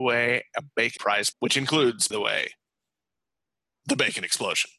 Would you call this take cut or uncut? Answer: cut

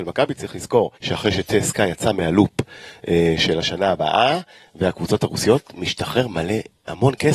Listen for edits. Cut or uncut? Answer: cut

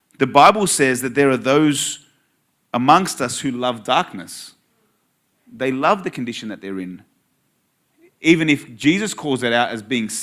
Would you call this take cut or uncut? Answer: uncut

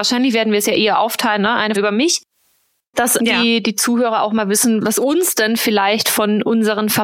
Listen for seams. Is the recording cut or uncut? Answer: cut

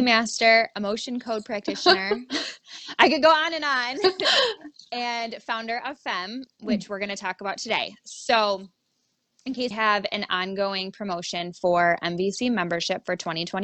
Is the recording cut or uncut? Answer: cut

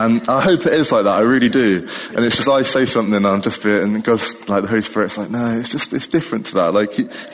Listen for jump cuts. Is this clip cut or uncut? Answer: uncut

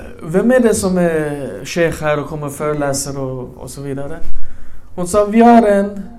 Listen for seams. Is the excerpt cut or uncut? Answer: uncut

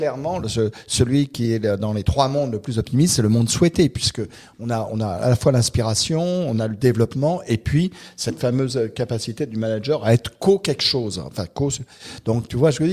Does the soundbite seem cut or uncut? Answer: uncut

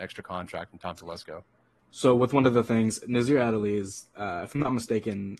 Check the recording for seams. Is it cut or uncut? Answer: uncut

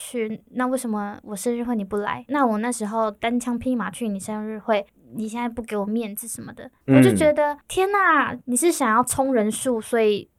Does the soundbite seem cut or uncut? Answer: uncut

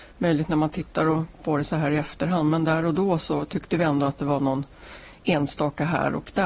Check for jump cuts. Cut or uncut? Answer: uncut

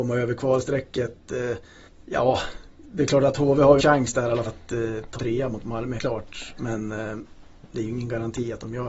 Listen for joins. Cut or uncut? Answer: cut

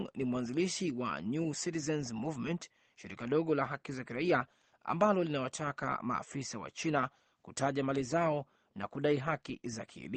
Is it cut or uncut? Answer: uncut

